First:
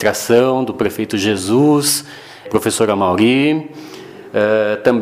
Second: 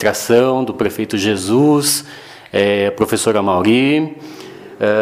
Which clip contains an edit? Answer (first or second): first